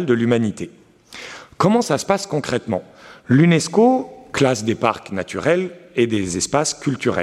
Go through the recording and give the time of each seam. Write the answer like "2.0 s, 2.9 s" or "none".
none